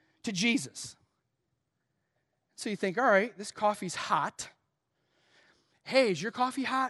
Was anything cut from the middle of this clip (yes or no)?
no